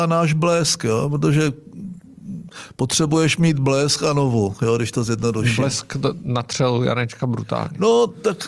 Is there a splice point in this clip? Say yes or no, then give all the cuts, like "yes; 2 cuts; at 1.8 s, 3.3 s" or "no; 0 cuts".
no; 0 cuts